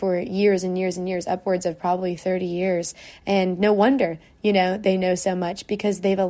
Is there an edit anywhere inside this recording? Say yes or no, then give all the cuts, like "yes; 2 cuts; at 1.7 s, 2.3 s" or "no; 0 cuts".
no; 0 cuts